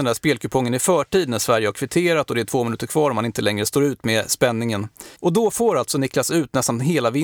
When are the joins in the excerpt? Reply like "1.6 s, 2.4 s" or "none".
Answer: 5.2 s

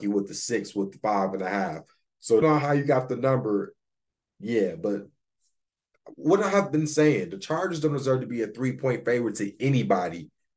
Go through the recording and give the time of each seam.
2.4 s

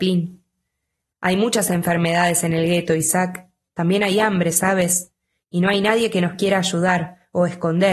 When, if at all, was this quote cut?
none

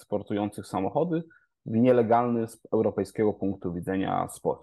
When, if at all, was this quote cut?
none

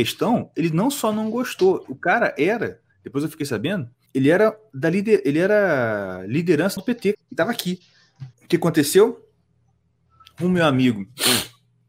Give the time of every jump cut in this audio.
2.9 s, 4.1 s, 6.8 s, 7.1 s, 8.3 s

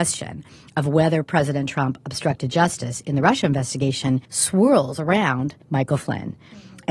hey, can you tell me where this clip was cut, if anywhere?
4.2 s, 5.6 s

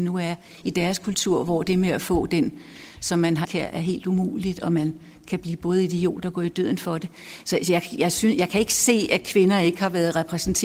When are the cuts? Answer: 3.4 s

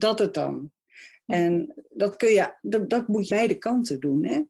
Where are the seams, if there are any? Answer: 3.3 s

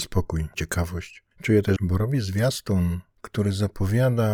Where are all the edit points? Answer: 1.8 s

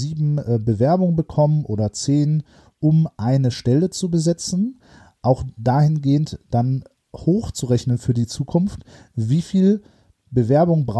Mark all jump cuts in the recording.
none

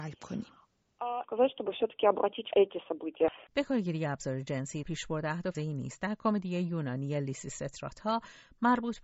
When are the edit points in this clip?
2.5 s, 3.5 s, 4.8 s, 5.5 s

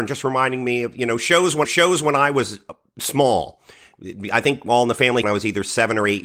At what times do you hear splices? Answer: 1.6 s, 5.2 s

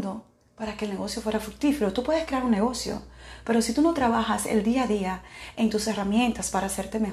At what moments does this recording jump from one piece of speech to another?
none

